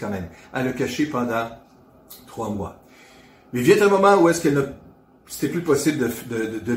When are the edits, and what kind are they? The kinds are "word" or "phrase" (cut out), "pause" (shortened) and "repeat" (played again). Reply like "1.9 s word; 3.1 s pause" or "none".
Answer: none